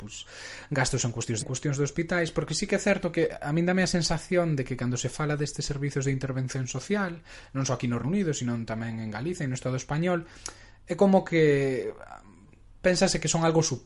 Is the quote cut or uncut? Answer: cut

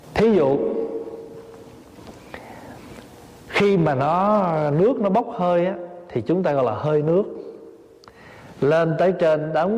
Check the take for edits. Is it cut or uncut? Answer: uncut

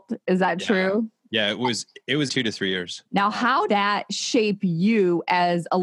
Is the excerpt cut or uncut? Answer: cut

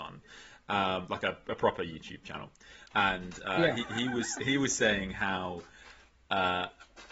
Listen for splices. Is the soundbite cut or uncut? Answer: uncut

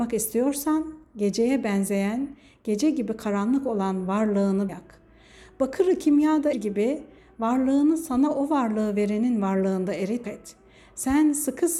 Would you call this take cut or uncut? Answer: cut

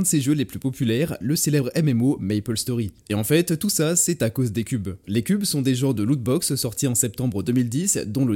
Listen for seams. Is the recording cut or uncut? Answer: uncut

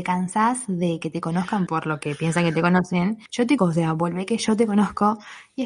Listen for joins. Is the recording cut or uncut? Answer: cut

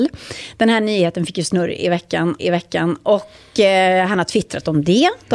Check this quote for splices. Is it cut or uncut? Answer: cut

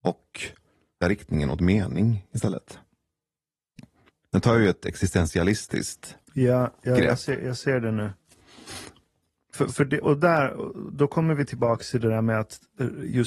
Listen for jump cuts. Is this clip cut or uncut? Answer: cut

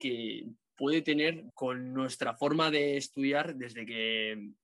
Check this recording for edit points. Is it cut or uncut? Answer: cut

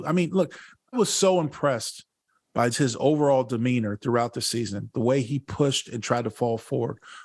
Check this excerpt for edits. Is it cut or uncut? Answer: cut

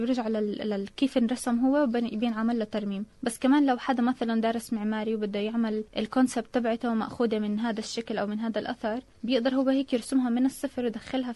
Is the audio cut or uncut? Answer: cut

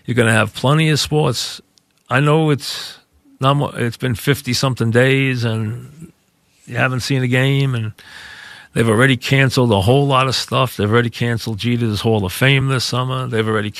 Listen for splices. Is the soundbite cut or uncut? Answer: uncut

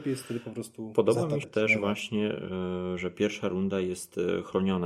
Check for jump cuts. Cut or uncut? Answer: cut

